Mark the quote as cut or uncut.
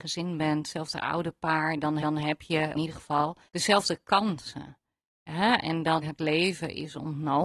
cut